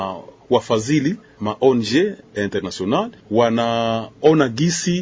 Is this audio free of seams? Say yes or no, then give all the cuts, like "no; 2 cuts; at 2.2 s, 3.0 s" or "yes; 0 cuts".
no; 2 cuts; at 1.4 s, 2.2 s